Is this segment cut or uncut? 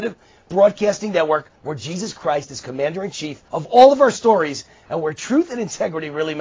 cut